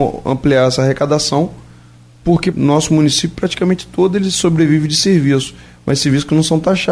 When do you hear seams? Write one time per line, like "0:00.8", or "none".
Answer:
0:02.5